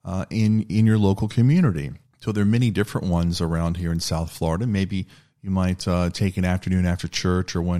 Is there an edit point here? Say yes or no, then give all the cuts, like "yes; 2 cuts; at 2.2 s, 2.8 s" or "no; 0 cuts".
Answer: yes; 1 cut; at 2.1 s